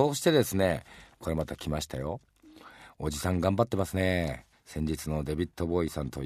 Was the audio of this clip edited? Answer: yes; 1 cut; at 4.5 s

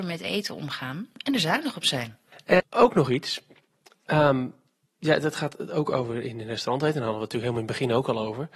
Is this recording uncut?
no; 1 cut; at 2.6 s

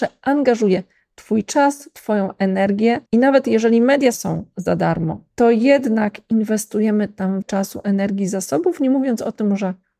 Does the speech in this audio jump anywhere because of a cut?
yes; 4 cuts; at 3.1 s, 4.1 s, 5.3 s, 7.4 s

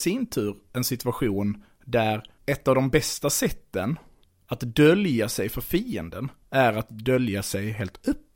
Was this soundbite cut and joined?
no; 0 cuts

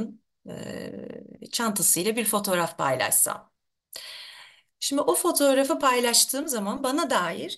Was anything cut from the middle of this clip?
no; 0 cuts

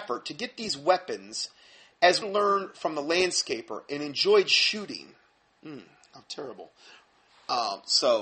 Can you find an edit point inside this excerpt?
yes; 1 cut; at 2.2 s

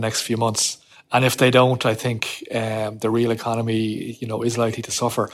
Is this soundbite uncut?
no; 1 cut; at 0.9 s

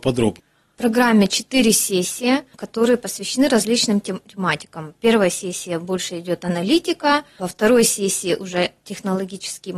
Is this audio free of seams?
yes; 0 cuts

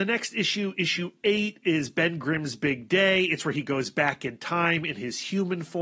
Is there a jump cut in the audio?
no; 0 cuts

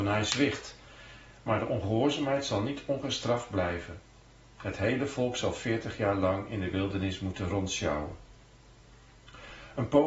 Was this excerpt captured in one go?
yes; 0 cuts

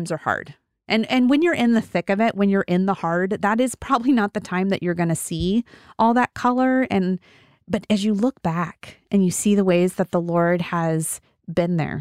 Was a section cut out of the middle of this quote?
no; 0 cuts

